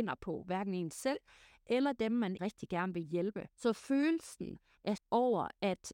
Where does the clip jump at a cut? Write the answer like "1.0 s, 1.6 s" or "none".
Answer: 2.4 s, 3.5 s, 5.0 s

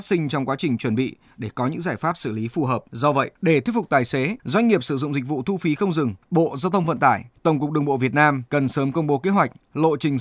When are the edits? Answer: 2.9 s, 3.4 s, 4.4 s, 6.2 s, 7.4 s, 8.5 s

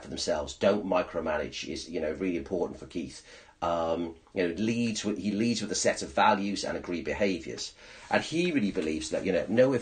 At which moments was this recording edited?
none

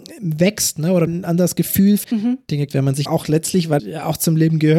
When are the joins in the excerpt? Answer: 1.1 s, 2.0 s, 2.7 s, 3.1 s, 3.8 s

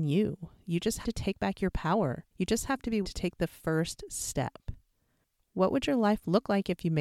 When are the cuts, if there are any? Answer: 1.0 s, 2.3 s, 3.0 s

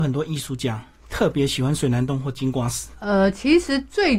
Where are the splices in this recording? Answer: none

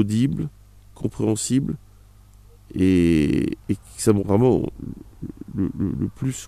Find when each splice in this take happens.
3.6 s, 4.2 s

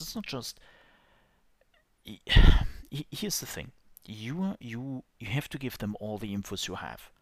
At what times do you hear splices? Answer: 5.1 s

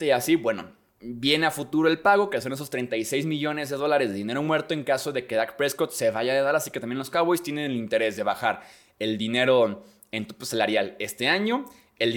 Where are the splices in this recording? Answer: none

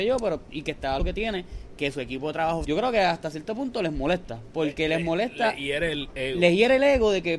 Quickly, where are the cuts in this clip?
1.0 s, 2.6 s

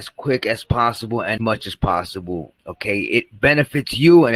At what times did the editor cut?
1.4 s, 2.6 s

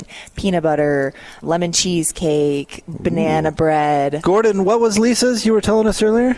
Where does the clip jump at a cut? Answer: 1.4 s

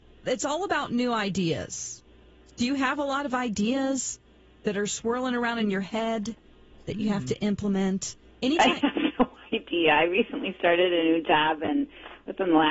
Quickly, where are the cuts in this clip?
none

